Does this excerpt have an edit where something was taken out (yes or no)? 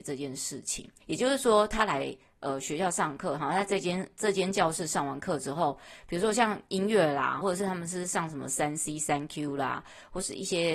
yes